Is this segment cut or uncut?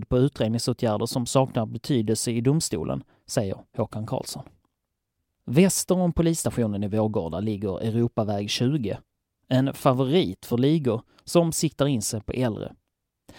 uncut